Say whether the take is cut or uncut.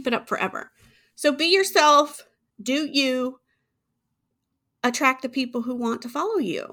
uncut